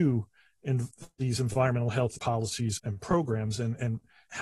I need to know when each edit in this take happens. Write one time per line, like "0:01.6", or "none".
0:02.2
0:02.8